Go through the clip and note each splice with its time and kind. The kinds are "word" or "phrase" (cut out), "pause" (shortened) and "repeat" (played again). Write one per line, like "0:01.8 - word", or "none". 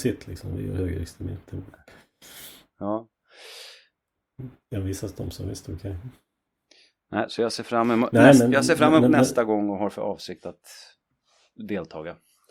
none